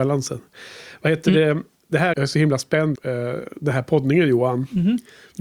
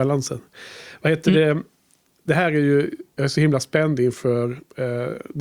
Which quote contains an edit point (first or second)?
first